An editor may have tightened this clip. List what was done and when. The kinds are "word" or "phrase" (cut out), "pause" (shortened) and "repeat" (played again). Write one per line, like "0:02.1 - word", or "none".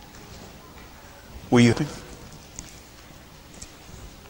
0:01.7 - word